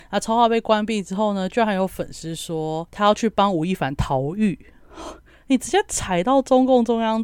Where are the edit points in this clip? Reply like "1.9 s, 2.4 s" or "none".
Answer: none